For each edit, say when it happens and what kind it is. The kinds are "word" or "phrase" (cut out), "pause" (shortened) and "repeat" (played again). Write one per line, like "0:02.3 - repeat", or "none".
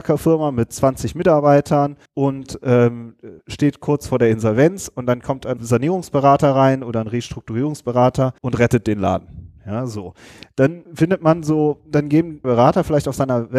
0:02.1 - pause
0:03.4 - pause
0:05.6 - word
0:08.4 - pause
0:10.8 - word
0:12.4 - phrase